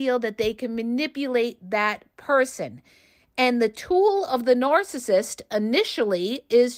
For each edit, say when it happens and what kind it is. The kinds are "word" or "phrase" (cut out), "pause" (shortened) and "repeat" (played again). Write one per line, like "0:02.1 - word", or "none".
none